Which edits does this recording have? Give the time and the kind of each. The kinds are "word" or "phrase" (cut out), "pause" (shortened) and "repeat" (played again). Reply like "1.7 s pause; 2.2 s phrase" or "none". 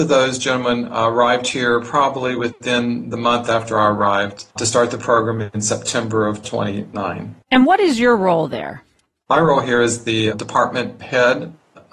4.5 s pause; 7.4 s pause